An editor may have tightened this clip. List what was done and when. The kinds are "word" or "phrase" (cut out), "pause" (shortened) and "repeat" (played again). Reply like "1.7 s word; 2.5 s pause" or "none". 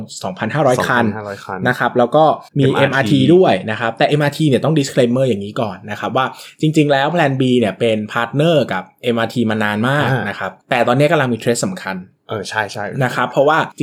2.5 s pause